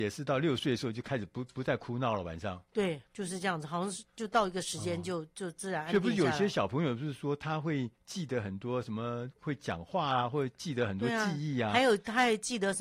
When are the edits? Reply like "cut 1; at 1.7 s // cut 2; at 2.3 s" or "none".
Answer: cut 1; at 3.1 s // cut 2; at 7.9 s // cut 3; at 9.4 s